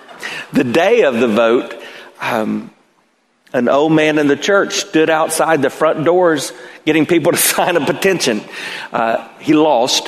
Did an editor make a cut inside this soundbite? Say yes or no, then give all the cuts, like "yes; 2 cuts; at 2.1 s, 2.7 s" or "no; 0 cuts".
no; 0 cuts